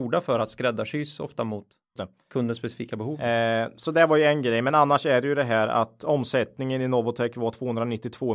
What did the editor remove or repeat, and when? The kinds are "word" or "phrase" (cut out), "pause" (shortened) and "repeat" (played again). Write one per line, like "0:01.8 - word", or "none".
0:02.0 - word